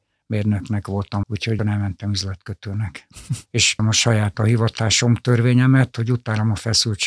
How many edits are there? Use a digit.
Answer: 4